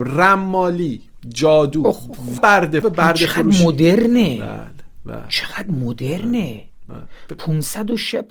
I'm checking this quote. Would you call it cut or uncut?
cut